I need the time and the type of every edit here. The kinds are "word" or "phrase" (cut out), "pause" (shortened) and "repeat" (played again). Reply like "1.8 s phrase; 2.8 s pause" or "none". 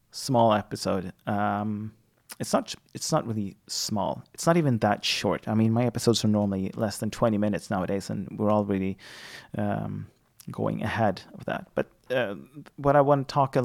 none